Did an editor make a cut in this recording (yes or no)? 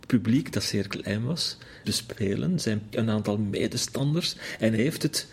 yes